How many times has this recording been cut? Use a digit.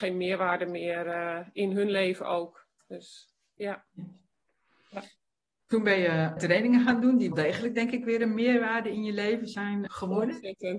3